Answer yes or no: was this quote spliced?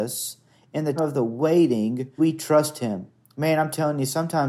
yes